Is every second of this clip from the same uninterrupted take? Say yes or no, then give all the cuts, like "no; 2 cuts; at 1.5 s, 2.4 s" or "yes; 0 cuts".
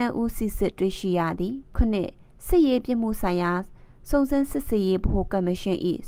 yes; 0 cuts